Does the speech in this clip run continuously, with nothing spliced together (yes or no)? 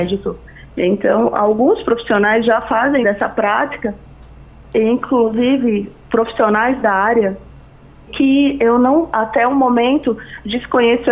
no